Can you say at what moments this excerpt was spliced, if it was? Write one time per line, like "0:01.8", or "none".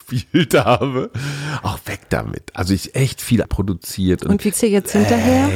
0:03.4
0:04.5